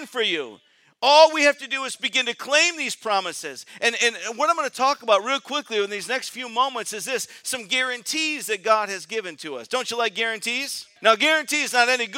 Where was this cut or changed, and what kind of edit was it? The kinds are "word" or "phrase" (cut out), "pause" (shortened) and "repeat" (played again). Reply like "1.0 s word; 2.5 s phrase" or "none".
11.0 s pause